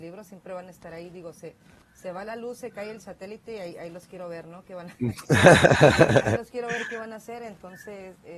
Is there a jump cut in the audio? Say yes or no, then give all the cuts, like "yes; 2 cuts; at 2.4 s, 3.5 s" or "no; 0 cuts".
no; 0 cuts